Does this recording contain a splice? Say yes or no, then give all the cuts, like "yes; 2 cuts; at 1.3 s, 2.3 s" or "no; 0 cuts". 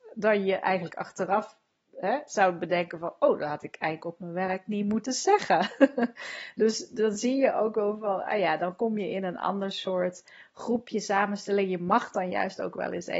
no; 0 cuts